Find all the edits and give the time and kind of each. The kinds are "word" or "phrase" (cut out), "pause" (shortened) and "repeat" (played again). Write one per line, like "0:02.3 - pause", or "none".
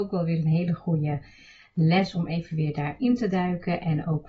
none